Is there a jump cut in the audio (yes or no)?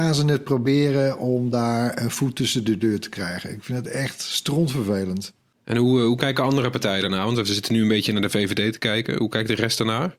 no